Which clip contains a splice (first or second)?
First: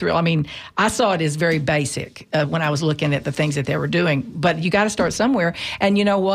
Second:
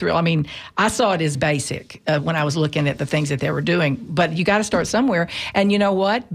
second